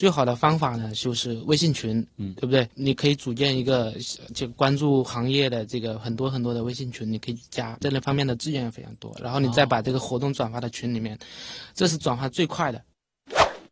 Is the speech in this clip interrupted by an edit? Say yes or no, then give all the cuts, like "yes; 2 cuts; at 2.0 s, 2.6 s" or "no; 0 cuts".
yes; 2 cuts; at 2.7 s, 7.8 s